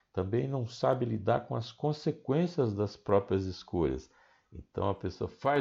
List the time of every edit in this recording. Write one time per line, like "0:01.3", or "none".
none